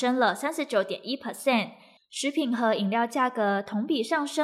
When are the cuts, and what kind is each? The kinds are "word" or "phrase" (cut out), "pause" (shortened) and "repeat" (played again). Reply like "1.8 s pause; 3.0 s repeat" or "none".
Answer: none

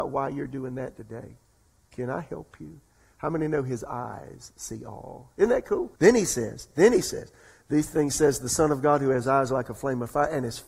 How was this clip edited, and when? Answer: 6.0 s pause

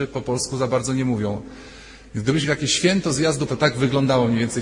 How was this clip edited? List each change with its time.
2.4 s word; 3.5 s word

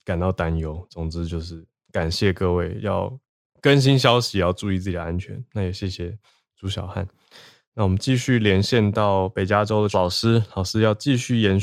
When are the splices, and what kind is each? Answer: 9.9 s word

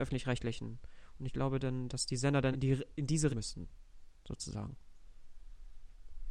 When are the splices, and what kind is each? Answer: 2.5 s phrase; 3.3 s word

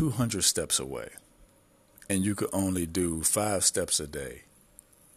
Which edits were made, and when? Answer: 1.5 s pause

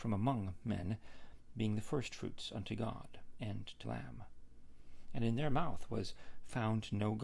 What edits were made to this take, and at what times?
3.8 s word

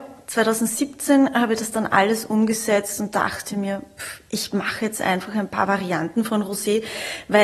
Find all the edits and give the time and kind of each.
none

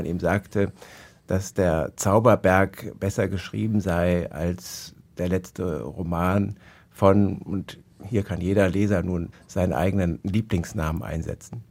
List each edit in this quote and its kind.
none

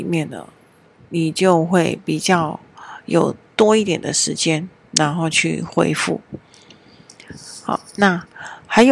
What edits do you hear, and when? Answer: none

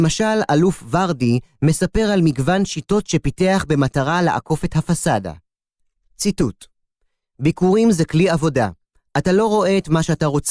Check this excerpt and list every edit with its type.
none

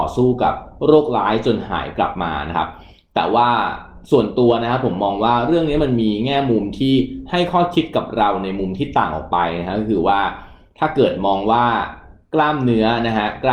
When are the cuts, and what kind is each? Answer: none

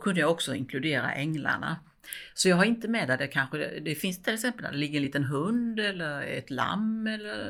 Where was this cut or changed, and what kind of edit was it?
none

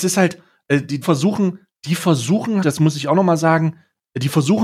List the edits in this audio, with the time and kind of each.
1.0 s word; 2.6 s word

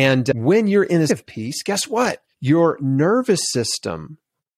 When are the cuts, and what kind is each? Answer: 1.1 s word; 2.3 s pause

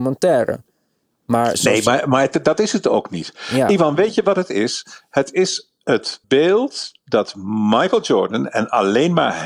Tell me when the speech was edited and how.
6.2 s pause

